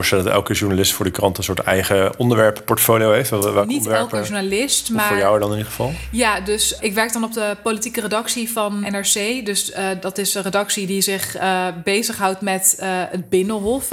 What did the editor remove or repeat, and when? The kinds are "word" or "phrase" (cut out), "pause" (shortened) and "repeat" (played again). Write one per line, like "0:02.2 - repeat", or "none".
0:06.8 - word
0:08.8 - word